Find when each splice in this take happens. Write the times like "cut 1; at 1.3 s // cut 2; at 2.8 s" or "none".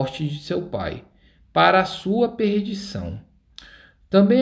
none